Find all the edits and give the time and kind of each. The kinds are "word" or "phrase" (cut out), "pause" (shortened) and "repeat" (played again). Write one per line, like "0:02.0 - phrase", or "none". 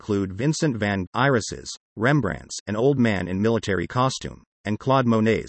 0:01.1 - word